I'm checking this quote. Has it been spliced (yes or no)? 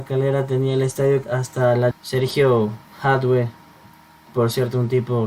yes